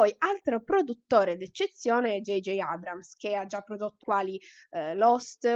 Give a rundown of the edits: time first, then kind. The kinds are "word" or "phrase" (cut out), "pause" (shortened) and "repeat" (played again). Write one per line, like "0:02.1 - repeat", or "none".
0:04.0 - word

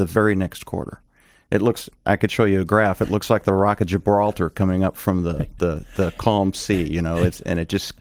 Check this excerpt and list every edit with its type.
0:02.0 - phrase

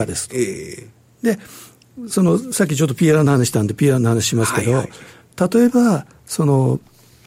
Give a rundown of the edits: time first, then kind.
none

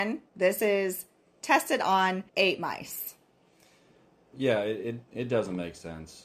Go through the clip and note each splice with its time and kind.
0:02.3 - pause

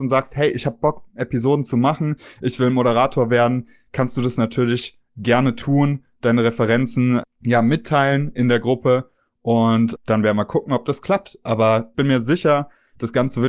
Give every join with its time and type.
0:07.2 - word
0:10.0 - word
0:11.9 - word

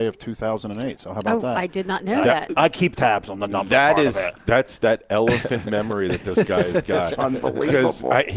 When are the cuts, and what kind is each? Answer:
none

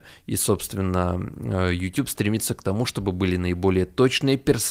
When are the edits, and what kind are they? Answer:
none

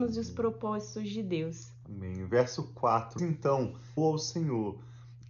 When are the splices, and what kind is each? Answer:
0:03.2 - word
0:04.0 - word

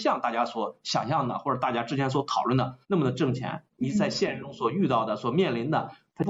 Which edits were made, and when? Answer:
0:02.8 - pause
0:03.7 - pause

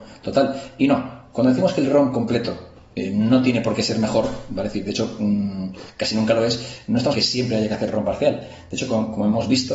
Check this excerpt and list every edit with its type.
0:07.1 - word

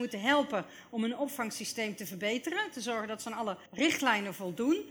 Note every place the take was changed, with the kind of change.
0:03.7 - pause

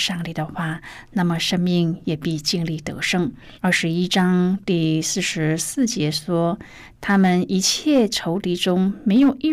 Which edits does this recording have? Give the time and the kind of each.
0:03.5 - pause

